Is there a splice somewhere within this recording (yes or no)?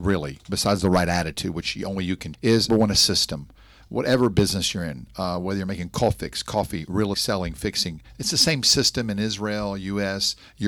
yes